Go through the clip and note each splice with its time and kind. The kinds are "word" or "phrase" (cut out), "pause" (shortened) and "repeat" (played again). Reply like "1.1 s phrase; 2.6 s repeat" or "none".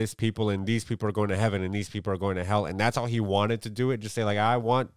none